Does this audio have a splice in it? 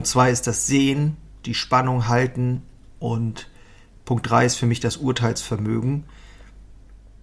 no; 0 cuts

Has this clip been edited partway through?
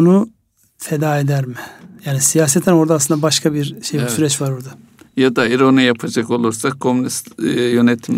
no; 0 cuts

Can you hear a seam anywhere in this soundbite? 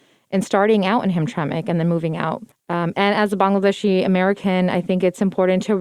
yes; 1 cut; at 2.5 s

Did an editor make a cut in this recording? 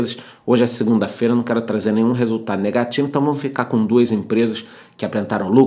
no; 0 cuts

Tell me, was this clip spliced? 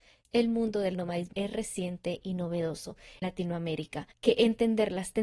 yes; 3 cuts; at 1.3 s, 3.2 s, 4.1 s

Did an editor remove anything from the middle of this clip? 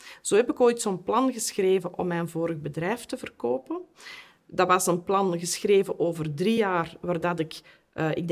no; 0 cuts

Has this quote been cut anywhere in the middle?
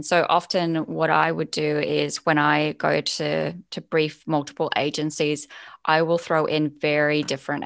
no; 0 cuts

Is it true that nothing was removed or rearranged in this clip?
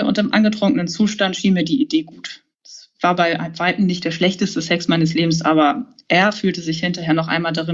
no; 1 cut; at 2.5 s

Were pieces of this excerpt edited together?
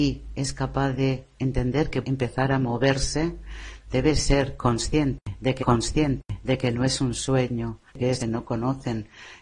yes; 4 cuts; at 2.0 s, 5.6 s, 7.9 s, 8.2 s

